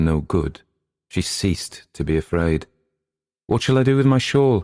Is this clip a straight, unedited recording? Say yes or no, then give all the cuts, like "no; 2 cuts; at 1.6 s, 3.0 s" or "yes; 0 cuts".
yes; 0 cuts